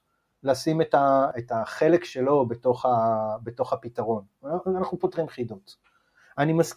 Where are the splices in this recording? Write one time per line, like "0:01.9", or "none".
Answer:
none